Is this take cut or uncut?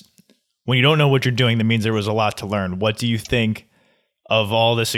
uncut